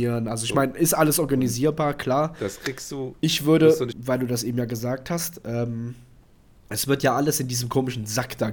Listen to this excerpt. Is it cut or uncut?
cut